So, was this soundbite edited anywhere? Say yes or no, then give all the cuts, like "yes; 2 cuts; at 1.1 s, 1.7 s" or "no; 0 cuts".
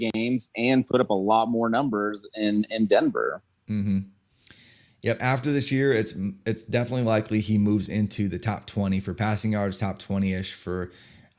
no; 0 cuts